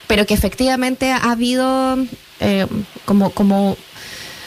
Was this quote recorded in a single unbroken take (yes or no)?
yes